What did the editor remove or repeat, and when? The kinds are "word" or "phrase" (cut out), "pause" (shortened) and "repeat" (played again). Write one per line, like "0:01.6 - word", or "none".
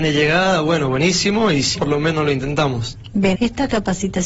0:01.8 - word
0:03.4 - word